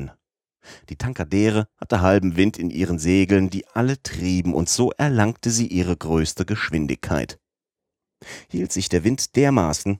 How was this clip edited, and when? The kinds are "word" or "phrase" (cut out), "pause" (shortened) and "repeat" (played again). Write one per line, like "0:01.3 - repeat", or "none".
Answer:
0:01.7 - pause